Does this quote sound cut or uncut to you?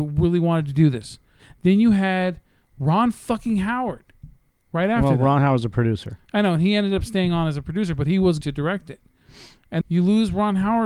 cut